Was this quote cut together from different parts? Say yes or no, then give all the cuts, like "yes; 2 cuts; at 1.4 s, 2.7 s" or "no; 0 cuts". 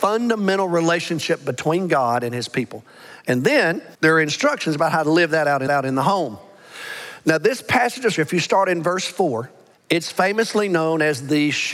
yes; 4 cuts; at 3.9 s, 5.7 s, 8.2 s, 9.7 s